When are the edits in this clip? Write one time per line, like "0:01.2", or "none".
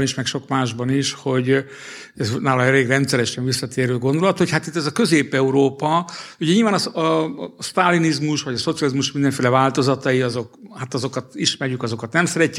none